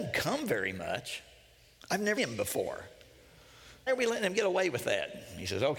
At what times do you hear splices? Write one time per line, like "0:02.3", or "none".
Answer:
0:02.2
0:03.9